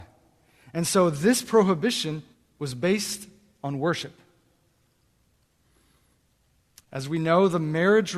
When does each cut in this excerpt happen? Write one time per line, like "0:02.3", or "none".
0:02.3